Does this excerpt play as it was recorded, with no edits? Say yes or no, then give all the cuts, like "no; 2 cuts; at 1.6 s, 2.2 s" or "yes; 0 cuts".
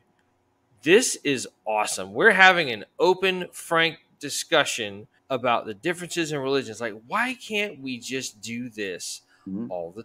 no; 1 cut; at 5.2 s